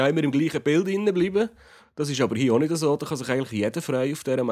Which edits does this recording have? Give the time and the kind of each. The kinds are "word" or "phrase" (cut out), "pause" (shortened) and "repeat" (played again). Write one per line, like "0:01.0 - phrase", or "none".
none

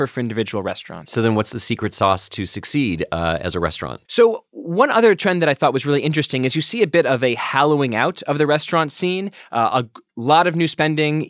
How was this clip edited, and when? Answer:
0:04.0 - pause

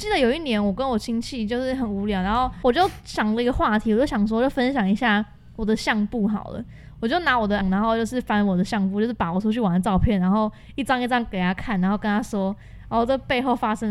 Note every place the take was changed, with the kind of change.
0:07.6 - word

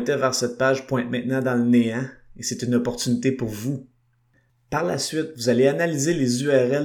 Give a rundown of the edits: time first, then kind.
none

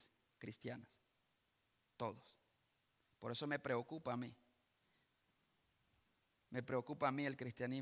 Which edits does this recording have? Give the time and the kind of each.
none

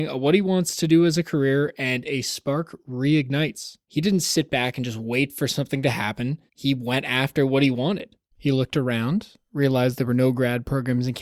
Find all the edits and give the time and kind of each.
0:03.8 - pause
0:06.5 - pause
0:08.3 - pause

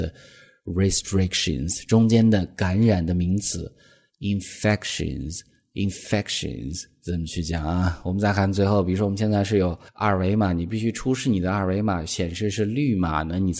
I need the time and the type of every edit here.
0:09.9 - pause

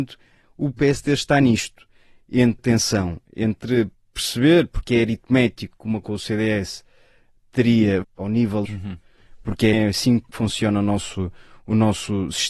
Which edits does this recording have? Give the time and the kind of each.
0:02.6 - word
0:03.9 - pause
0:06.0 - word
0:08.0 - word
0:08.6 - phrase
0:09.7 - word

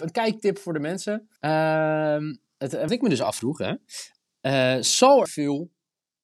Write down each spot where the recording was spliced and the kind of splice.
0:01.4 - pause
0:02.9 - word
0:05.3 - word

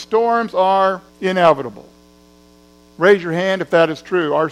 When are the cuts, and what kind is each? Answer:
0:01.1 - pause

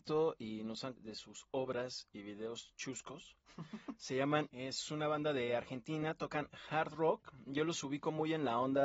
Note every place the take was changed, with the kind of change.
0:00.9 - phrase
0:02.1 - word
0:04.5 - phrase

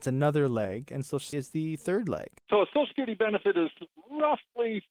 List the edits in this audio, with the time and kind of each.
0:01.3 - word
0:02.4 - pause

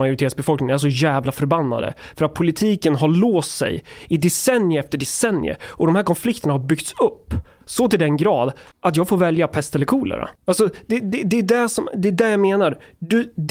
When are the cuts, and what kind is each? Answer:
0:08.7 - pause
0:10.4 - pause

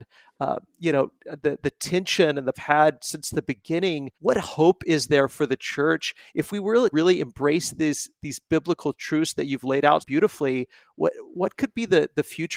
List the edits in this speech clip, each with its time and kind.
0:02.5 - phrase
0:04.1 - pause
0:06.9 - word
0:10.0 - word

